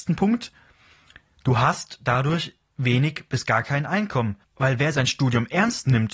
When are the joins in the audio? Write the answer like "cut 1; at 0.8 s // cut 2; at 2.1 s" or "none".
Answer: cut 1; at 4.4 s